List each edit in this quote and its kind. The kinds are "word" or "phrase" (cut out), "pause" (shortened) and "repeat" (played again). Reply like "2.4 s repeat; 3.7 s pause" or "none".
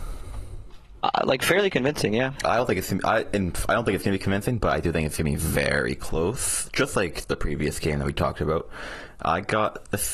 none